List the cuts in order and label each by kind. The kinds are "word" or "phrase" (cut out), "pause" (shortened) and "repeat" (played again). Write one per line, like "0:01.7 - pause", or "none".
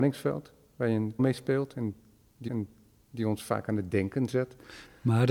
0:01.2 - word
0:02.5 - repeat